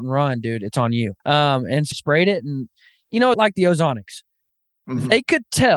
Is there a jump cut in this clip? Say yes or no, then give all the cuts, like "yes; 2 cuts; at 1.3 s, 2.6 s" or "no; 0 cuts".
yes; 3 cuts; at 1.2 s, 1.9 s, 3.3 s